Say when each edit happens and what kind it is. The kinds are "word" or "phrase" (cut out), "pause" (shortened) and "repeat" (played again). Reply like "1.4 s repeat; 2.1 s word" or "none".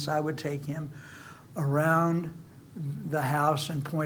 2.7 s pause